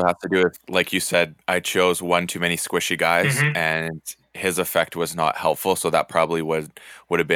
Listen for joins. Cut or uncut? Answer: cut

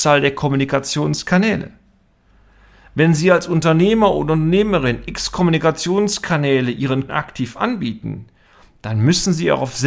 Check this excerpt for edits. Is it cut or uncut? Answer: cut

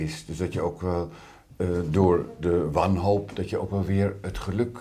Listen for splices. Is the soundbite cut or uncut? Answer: uncut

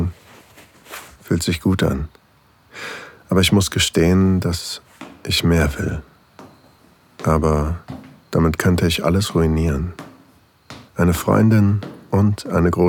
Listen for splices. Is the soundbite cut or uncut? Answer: cut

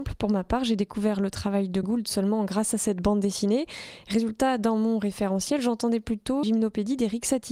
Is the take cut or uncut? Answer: cut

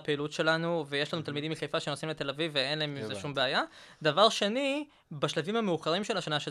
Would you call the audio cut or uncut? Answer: uncut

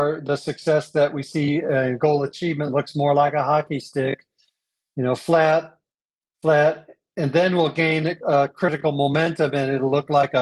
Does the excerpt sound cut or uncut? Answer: uncut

